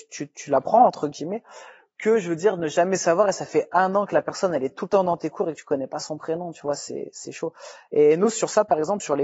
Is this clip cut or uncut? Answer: uncut